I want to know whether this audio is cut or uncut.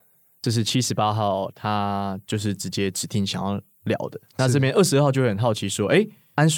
uncut